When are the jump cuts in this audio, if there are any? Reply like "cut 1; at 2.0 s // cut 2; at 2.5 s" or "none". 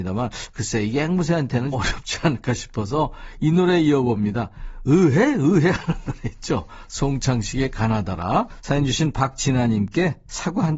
cut 1; at 1.7 s